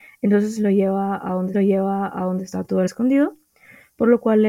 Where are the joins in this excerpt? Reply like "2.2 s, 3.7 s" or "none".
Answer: 1.5 s, 2.9 s